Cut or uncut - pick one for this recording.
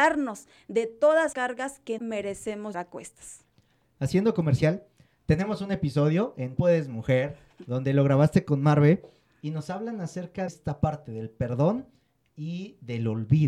cut